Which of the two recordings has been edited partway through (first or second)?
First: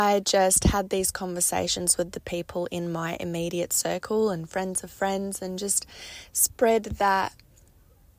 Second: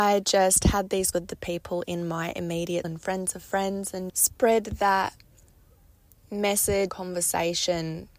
second